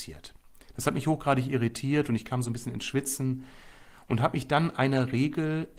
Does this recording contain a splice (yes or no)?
no